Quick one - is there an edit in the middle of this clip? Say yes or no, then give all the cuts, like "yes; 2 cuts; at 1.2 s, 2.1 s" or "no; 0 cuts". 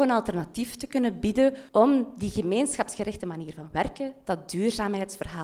yes; 1 cut; at 1.7 s